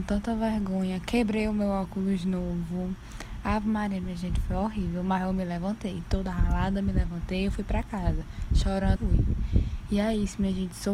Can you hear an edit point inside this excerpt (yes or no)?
yes